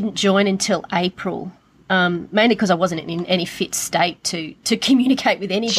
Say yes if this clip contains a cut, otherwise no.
no